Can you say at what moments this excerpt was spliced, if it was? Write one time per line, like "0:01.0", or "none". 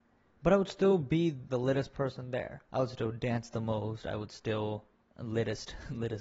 0:01.5
0:02.6
0:05.0